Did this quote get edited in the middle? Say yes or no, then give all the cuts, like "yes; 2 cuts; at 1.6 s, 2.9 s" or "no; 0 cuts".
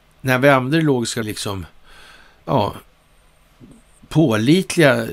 yes; 1 cut; at 1.2 s